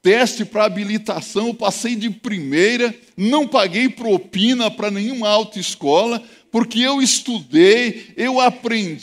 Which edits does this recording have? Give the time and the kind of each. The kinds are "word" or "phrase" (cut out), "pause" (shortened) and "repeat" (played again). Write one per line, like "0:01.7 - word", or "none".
none